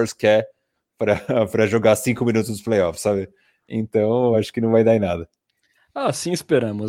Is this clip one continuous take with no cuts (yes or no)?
yes